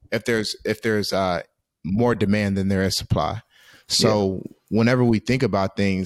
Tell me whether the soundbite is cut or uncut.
uncut